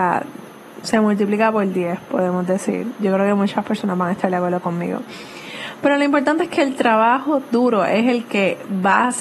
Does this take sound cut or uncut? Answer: uncut